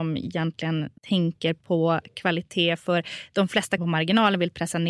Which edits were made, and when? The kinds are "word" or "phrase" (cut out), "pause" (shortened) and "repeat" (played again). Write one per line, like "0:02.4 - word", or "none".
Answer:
0:01.0 - pause
0:03.8 - word